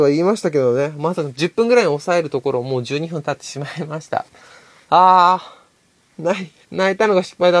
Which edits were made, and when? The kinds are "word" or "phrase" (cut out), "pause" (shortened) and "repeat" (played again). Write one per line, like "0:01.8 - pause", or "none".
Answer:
0:06.6 - pause